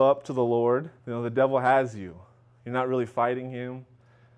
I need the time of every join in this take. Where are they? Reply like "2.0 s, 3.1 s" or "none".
1.0 s